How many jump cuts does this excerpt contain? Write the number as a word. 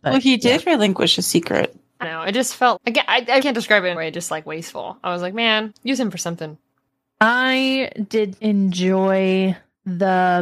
six